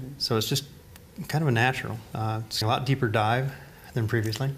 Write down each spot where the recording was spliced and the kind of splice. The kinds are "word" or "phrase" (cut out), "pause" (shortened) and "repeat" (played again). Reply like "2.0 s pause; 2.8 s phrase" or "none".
2.6 s word